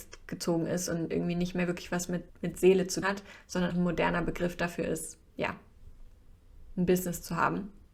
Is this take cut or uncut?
cut